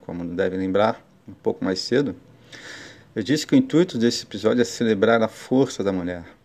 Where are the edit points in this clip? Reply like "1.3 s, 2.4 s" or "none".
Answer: none